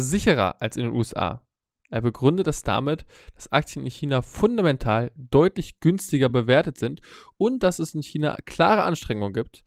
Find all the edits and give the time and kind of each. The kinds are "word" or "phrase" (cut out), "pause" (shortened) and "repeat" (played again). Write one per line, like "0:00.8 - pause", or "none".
none